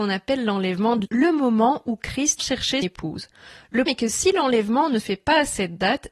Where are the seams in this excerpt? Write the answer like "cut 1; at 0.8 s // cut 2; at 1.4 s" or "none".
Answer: cut 1; at 1.0 s // cut 2; at 2.4 s // cut 3; at 2.8 s // cut 4; at 3.9 s // cut 5; at 5.0 s